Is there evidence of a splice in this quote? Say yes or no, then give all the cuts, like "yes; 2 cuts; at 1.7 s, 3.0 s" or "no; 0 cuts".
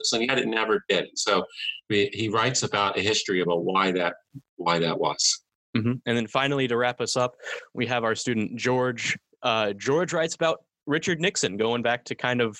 no; 0 cuts